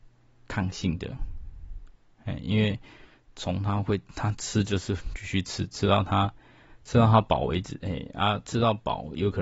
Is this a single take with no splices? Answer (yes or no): yes